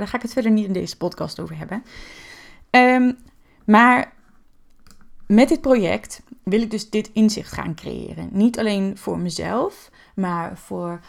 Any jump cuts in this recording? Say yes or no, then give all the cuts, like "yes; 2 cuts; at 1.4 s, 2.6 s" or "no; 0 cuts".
no; 0 cuts